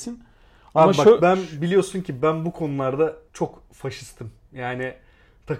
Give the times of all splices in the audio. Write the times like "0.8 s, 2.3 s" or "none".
3.3 s